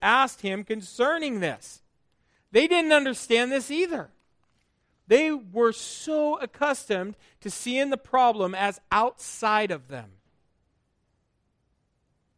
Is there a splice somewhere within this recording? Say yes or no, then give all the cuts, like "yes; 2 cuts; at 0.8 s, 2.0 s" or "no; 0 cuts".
no; 0 cuts